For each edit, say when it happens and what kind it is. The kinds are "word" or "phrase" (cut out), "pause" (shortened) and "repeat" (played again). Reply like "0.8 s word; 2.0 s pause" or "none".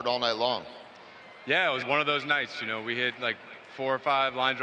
1.8 s word